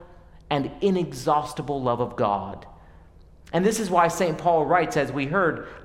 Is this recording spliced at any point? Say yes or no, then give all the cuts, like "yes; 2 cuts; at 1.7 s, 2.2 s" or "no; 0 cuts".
no; 0 cuts